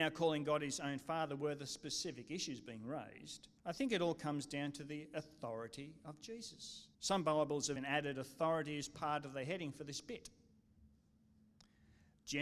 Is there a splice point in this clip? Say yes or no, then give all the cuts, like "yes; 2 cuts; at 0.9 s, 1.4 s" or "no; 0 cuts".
yes; 3 cuts; at 3.6 s, 6.9 s, 7.8 s